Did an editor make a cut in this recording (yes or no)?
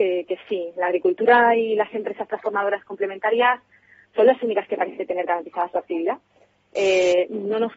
no